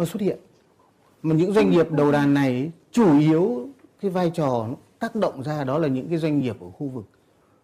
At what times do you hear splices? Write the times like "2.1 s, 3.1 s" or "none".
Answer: none